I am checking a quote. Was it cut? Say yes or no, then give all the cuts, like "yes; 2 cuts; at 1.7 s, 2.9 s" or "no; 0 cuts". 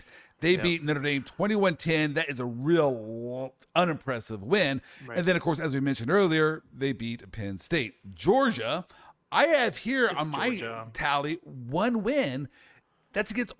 no; 0 cuts